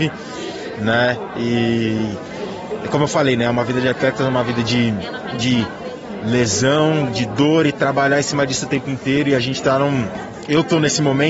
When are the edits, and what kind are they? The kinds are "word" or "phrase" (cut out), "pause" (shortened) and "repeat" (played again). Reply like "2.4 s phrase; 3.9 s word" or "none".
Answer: none